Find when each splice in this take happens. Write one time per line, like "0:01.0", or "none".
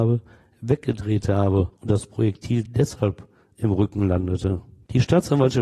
none